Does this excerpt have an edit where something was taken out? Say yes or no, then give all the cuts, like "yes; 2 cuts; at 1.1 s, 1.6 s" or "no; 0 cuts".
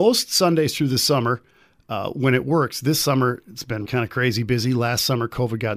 yes; 1 cut; at 3.8 s